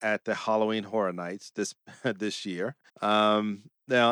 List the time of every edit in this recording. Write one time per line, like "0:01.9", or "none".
0:02.9